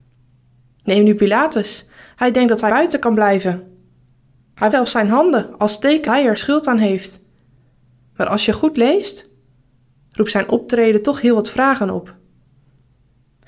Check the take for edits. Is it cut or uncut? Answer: cut